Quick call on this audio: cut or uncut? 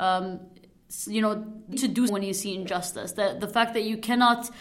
cut